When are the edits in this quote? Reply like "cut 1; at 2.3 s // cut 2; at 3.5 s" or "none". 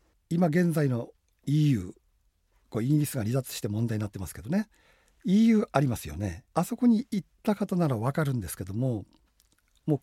cut 1; at 6.5 s